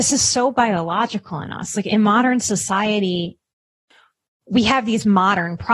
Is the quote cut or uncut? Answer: uncut